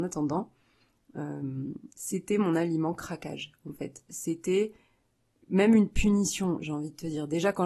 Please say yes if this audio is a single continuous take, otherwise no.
yes